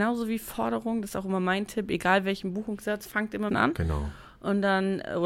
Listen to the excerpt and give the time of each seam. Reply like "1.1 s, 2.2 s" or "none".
3.5 s